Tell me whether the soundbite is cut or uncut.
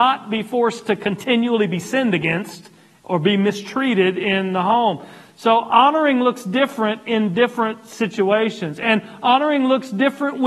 uncut